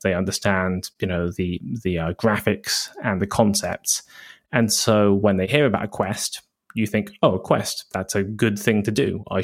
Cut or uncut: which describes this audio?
uncut